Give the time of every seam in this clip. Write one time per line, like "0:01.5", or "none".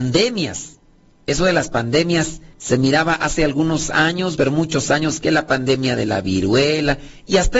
0:02.5
0:04.4